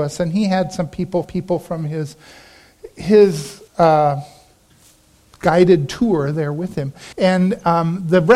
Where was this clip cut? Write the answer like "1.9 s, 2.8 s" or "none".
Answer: 1.2 s, 3.7 s, 7.1 s